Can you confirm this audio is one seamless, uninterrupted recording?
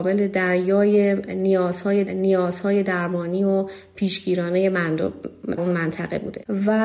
no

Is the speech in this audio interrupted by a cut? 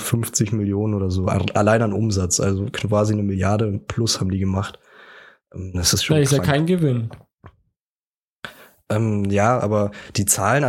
no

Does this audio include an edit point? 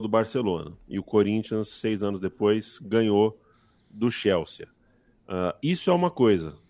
no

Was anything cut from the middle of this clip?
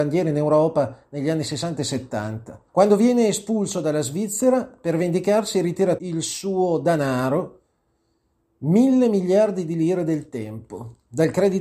yes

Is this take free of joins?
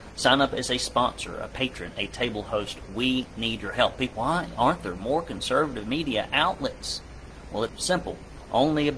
no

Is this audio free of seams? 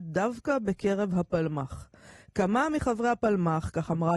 yes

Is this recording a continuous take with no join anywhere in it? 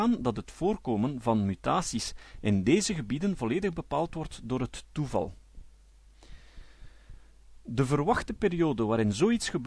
yes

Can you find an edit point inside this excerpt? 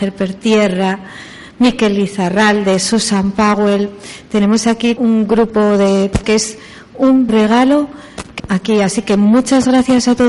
yes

